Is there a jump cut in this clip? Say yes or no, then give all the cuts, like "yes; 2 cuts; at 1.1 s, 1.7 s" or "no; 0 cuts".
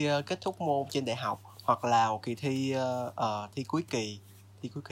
no; 0 cuts